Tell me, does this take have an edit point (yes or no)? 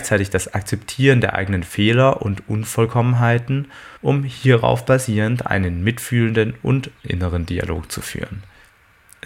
yes